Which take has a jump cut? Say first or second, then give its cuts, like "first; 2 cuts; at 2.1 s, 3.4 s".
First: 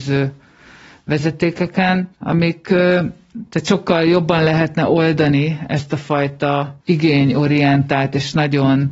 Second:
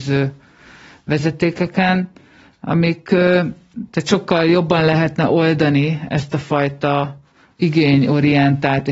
first; 2 cuts; at 2.1 s, 6.8 s